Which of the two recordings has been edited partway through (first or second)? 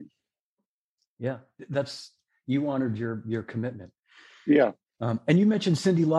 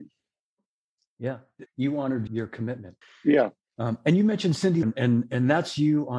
second